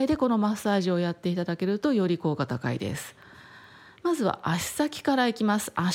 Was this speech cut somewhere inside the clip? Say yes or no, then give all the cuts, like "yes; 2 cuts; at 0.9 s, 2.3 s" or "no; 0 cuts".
no; 0 cuts